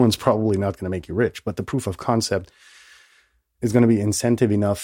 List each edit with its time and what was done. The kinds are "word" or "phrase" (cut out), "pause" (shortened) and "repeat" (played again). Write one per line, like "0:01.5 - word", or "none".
none